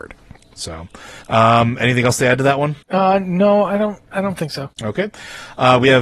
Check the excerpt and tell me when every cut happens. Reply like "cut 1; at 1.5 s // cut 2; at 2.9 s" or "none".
cut 1; at 1.2 s // cut 2; at 2.8 s // cut 3; at 4.7 s